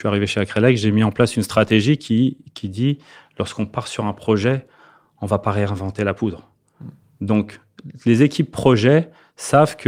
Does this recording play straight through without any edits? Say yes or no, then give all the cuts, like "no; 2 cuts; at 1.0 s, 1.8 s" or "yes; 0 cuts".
yes; 0 cuts